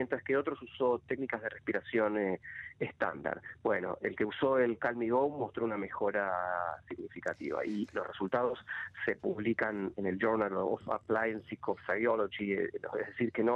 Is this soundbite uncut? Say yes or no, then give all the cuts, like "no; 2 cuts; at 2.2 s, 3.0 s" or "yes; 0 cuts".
no; 1 cut; at 9.9 s